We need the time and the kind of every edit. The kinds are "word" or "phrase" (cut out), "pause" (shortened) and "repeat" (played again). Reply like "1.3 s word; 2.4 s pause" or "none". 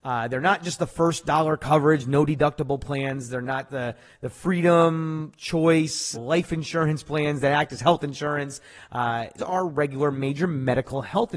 6.1 s word; 9.4 s word